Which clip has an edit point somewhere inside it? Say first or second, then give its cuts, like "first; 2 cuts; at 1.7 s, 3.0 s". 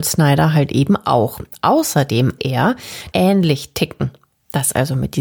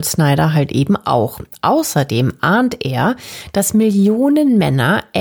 first; 2 cuts; at 2.4 s, 3.1 s